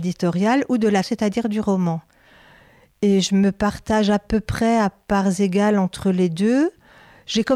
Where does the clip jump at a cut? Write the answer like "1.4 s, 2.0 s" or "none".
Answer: 1.0 s